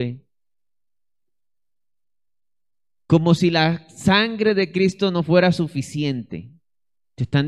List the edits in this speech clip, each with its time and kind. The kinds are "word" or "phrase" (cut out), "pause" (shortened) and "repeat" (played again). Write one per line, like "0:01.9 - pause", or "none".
none